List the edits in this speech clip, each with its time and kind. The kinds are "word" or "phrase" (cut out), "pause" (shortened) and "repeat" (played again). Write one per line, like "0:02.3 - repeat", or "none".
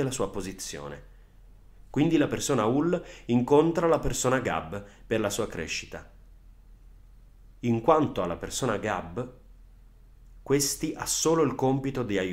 none